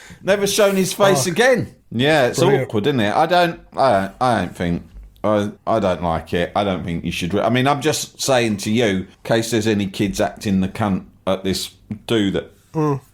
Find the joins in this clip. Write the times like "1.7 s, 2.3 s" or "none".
1.8 s, 5.6 s, 9.1 s